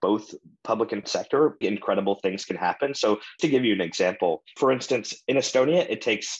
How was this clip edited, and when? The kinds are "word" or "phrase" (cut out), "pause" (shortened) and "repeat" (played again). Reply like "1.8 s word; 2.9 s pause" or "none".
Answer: 1.0 s word; 1.6 s word; 3.4 s word; 4.6 s word